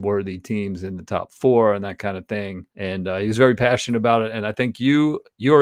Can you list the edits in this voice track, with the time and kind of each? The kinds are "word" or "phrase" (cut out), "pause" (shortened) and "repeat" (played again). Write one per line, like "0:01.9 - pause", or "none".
0:02.7 - pause